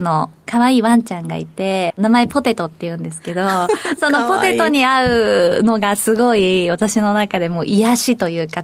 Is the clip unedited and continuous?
no; 1 cut; at 1.9 s

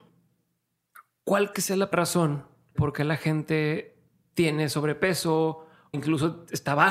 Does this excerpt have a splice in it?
yes; 4 cuts; at 1.5 s, 1.9 s, 2.7 s, 5.9 s

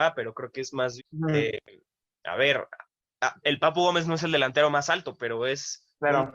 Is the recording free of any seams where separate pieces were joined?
no; 1 cut; at 1.0 s

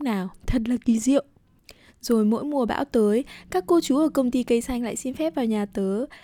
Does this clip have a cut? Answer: no; 0 cuts

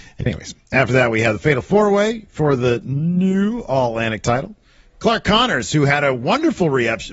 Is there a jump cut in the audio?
no; 0 cuts

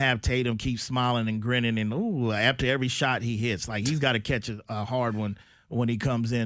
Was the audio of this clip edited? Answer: no; 0 cuts

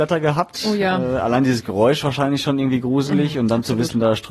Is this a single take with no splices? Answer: yes; 0 cuts

